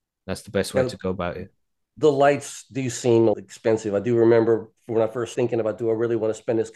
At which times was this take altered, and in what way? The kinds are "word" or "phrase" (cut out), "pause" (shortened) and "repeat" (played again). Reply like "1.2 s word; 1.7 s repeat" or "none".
3.3 s word; 5.4 s word